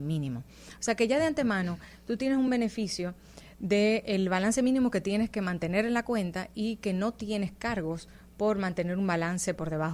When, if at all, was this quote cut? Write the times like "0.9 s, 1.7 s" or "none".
none